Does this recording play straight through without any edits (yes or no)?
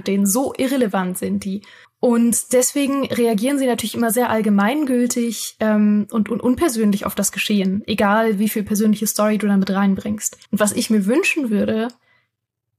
no